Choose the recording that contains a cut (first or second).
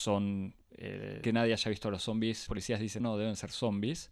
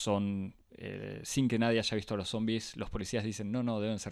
first